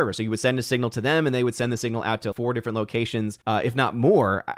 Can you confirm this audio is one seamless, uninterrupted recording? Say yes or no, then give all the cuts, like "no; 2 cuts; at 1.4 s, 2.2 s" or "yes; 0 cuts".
no; 2 cuts; at 2.3 s, 3.4 s